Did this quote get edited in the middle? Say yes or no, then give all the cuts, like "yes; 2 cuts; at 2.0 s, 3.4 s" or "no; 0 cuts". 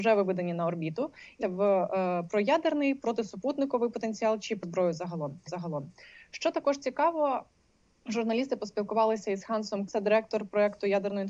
yes; 4 cuts; at 1.4 s, 4.6 s, 5.5 s, 9.9 s